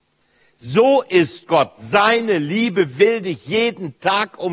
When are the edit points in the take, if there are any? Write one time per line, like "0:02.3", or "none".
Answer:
none